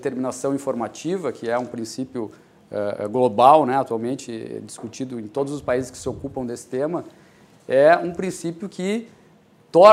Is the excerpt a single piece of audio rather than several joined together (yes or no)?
yes